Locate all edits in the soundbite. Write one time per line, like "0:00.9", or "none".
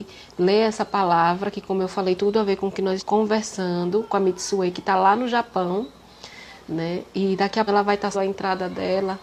0:02.2
0:03.0
0:07.7
0:08.1